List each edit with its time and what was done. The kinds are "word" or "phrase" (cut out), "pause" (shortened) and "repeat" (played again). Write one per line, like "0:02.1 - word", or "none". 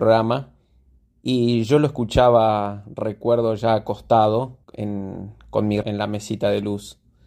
0:04.6 - pause
0:05.8 - word